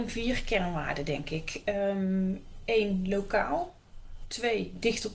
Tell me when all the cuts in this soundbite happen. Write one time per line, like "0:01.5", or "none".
none